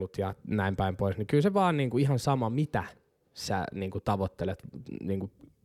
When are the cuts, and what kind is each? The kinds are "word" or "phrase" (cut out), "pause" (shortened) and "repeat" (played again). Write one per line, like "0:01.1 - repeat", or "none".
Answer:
none